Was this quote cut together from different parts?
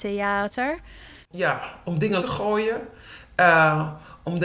yes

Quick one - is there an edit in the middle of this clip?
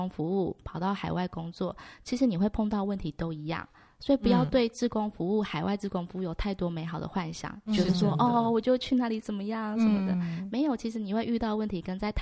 no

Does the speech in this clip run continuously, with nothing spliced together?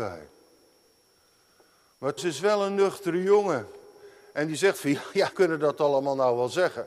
no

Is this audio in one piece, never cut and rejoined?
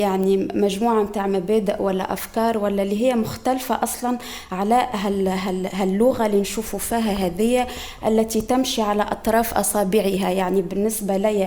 yes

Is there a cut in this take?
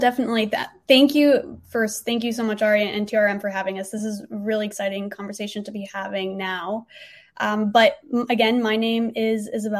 no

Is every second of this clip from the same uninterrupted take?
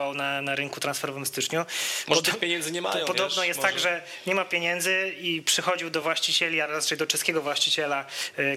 yes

